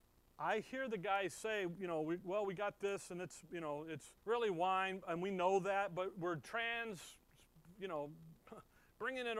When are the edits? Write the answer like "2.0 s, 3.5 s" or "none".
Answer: 4.2 s